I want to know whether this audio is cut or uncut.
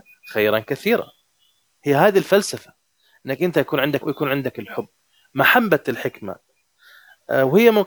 cut